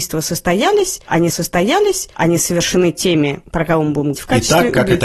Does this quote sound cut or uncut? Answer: cut